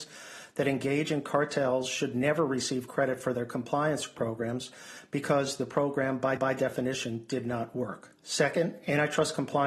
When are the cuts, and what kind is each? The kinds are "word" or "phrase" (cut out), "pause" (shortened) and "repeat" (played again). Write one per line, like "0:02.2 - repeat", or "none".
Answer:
0:06.4 - repeat
0:08.2 - pause